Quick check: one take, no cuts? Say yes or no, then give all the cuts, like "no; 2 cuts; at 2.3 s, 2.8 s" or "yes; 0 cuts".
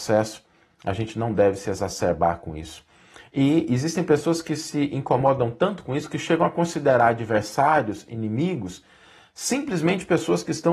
yes; 0 cuts